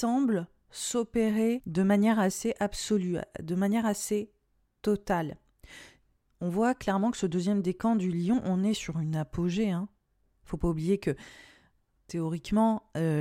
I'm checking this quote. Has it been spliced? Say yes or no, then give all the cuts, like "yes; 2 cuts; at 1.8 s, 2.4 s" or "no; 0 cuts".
no; 0 cuts